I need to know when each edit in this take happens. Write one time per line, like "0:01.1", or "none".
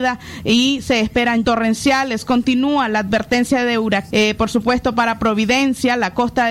0:01.4
0:04.1